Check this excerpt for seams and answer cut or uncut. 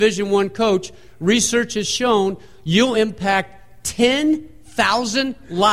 uncut